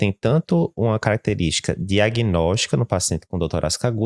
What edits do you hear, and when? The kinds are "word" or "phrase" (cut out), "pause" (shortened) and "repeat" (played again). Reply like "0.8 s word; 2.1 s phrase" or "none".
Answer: none